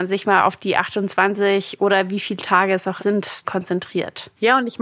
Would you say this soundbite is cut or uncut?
cut